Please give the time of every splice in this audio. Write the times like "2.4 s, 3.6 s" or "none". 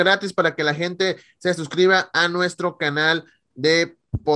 none